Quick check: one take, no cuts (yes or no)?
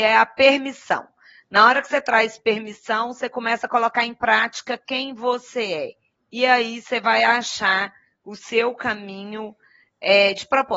yes